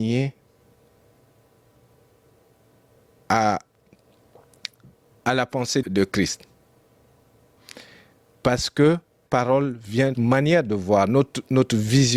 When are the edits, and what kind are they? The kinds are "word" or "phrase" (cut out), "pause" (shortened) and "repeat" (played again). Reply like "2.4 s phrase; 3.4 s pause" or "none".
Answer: 5.8 s word; 9.3 s word; 10.1 s phrase